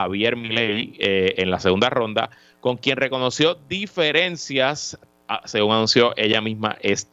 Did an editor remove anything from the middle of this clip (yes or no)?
no